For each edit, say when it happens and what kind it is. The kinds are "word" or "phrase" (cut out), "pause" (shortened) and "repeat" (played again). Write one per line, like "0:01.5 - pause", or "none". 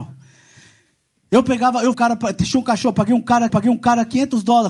0:01.9 - phrase
0:03.5 - repeat